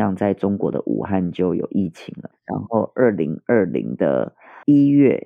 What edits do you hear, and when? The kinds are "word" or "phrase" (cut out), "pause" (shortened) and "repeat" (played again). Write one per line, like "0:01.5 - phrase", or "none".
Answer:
0:02.3 - word